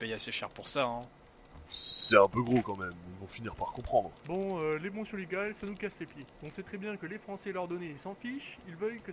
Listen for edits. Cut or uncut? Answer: cut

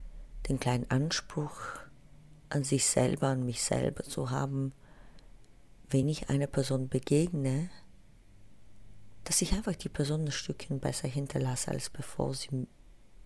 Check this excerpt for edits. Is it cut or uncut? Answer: uncut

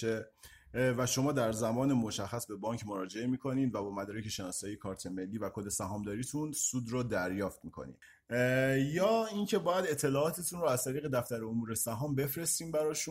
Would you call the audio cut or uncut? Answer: uncut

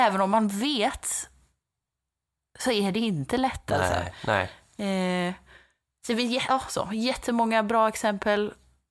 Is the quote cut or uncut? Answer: uncut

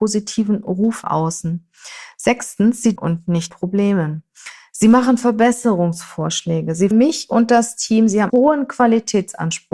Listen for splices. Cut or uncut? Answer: cut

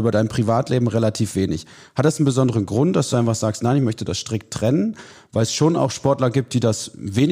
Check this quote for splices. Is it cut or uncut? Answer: uncut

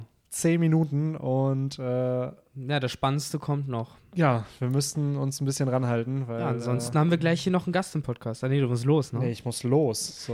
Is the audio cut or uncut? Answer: uncut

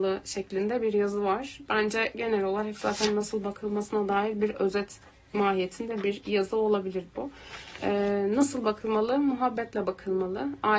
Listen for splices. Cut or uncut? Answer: uncut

